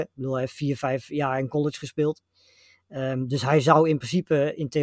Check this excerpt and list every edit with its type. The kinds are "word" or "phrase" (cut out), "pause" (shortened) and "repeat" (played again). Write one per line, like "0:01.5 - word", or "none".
none